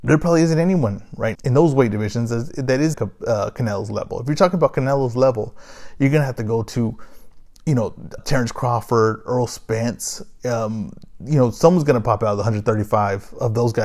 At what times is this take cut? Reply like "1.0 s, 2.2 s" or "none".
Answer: 1.3 s, 2.9 s, 8.2 s